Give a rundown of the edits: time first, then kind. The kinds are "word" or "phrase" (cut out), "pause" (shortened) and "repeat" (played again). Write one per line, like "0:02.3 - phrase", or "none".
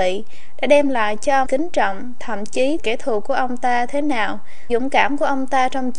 0:01.4 - word
0:02.8 - word
0:04.7 - word